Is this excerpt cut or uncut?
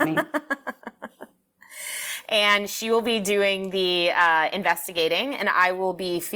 uncut